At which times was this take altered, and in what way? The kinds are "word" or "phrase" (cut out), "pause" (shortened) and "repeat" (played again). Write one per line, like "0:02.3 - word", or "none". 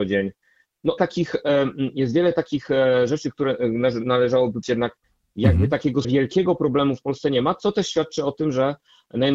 0:01.0 - phrase
0:04.6 - word
0:06.0 - word